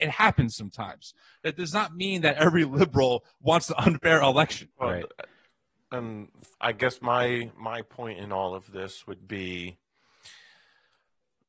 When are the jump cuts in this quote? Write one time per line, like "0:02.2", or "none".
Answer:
0:04.7
0:06.5
0:09.2